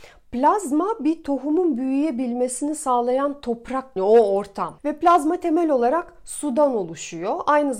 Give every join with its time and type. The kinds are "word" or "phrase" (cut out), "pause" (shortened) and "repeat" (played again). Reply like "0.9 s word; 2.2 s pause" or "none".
4.0 s phrase; 4.8 s pause